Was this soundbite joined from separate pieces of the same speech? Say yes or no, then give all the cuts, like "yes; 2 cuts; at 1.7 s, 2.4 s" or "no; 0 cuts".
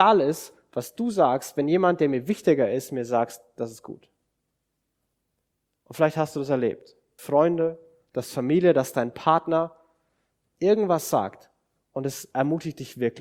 yes; 1 cut; at 7.2 s